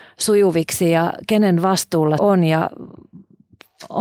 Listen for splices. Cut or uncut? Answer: cut